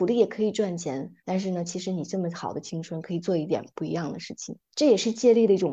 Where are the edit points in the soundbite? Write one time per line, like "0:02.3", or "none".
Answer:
0:01.2
0:04.6